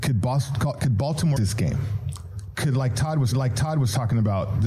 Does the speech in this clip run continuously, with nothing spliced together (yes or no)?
no